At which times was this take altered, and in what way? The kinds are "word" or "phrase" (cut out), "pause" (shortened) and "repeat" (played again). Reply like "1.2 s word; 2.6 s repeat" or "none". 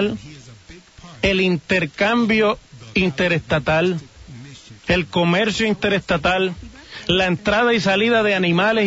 4.8 s pause